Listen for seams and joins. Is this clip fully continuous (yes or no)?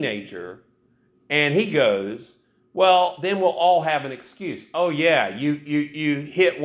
yes